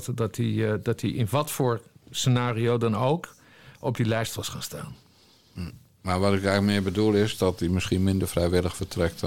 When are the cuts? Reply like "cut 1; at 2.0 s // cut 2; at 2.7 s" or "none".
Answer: none